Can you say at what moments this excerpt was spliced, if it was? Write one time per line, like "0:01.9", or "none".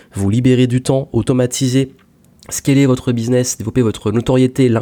none